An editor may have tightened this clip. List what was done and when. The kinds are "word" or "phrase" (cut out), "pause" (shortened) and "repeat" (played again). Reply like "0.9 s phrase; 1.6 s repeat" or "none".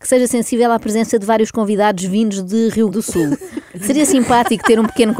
2.9 s word